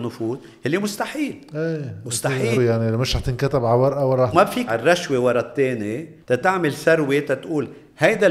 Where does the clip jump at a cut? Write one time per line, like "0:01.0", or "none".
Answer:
0:02.5
0:04.3
0:04.7
0:06.2